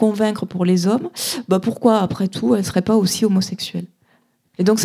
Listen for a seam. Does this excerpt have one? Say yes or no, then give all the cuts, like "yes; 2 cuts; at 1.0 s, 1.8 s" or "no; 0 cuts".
no; 0 cuts